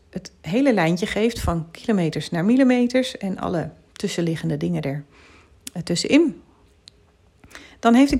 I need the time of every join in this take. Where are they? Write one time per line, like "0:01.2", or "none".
none

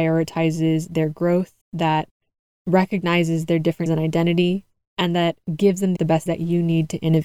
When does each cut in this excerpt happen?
0:01.6
0:03.9
0:06.0
0:06.3

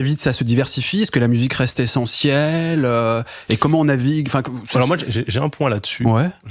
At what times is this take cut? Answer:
none

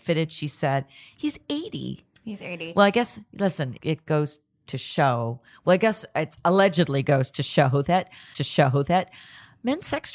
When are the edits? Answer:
0:03.8
0:08.3

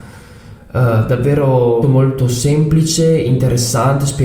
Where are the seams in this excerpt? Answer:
0:01.8

